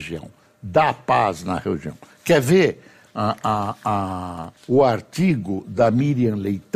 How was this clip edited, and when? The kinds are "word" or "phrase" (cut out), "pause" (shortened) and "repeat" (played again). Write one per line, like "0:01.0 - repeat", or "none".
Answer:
0:04.6 - pause

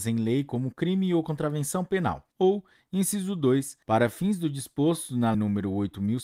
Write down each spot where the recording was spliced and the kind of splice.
0:02.3 - pause
0:03.8 - pause
0:05.3 - word

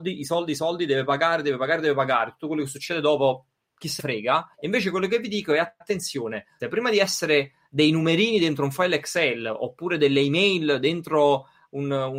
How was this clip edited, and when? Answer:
0:04.0 - word
0:04.5 - pause
0:06.6 - phrase

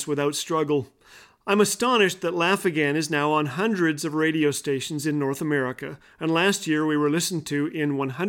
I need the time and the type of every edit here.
none

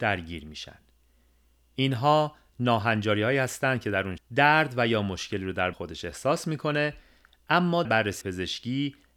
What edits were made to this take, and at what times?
0:04.2 - word
0:05.7 - word
0:07.8 - word
0:08.2 - word

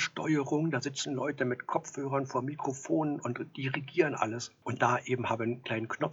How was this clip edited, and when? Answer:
0:04.8 - phrase

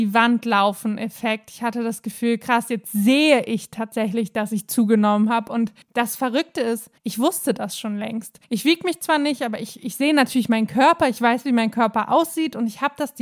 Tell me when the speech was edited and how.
0:05.8 - pause
0:07.0 - pause
0:08.4 - pause

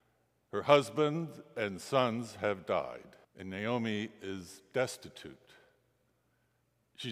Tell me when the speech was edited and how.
0:03.2 - pause

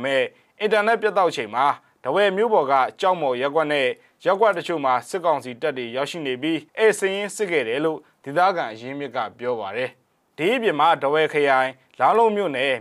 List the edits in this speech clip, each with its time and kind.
0:06.7 - pause

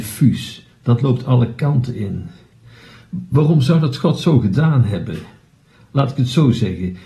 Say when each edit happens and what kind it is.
none

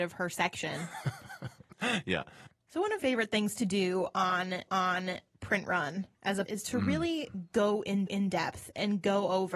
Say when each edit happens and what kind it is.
0:02.5 - pause
0:03.0 - word
0:04.7 - repeat
0:06.1 - pause
0:06.5 - word
0:08.1 - repeat

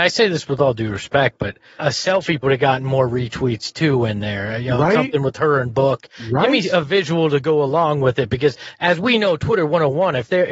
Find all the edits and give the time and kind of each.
0:01.8 - word
0:02.4 - word

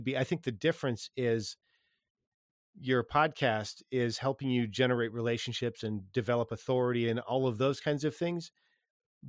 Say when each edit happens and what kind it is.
none

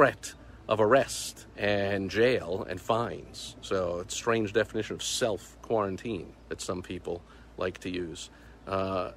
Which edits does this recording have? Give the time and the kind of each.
0:01.5 - pause
0:06.4 - pause

